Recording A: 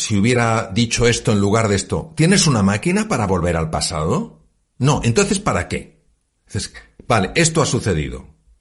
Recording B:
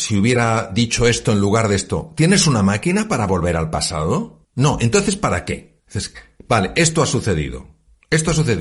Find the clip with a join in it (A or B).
B